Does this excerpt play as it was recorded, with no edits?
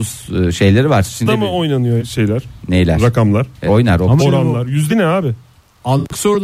no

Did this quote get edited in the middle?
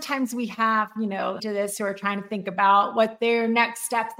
yes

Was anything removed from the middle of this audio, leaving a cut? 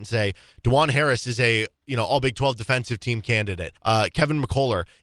yes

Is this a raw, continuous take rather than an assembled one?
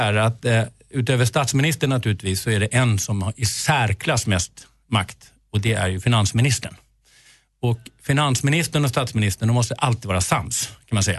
yes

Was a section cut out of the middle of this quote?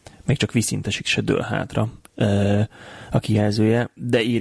no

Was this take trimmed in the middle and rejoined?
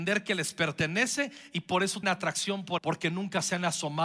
yes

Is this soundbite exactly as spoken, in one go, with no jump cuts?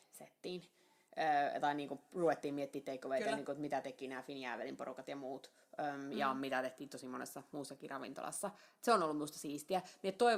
yes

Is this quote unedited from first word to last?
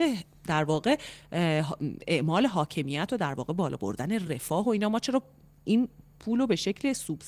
yes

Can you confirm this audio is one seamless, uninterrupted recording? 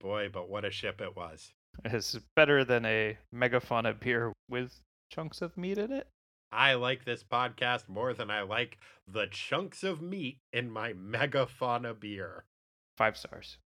yes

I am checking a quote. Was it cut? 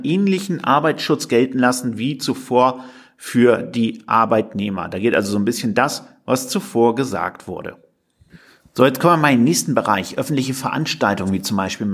no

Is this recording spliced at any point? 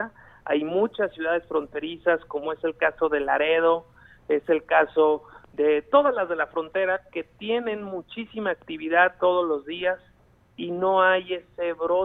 no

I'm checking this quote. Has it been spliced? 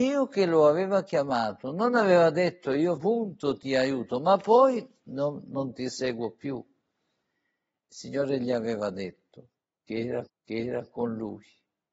yes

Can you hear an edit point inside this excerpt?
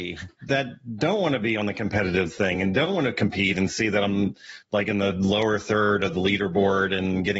no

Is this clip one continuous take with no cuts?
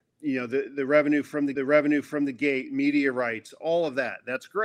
no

